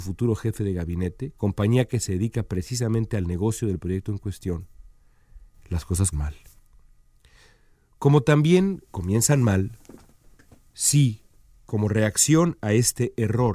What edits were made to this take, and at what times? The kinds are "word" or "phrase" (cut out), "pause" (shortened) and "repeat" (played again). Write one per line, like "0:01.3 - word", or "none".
0:06.1 - word
0:08.9 - pause